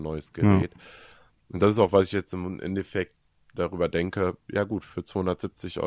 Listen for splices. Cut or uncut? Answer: uncut